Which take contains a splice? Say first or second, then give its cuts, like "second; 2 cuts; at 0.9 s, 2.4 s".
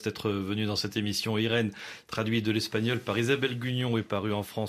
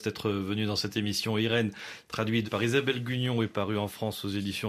second; 1 cut; at 2.4 s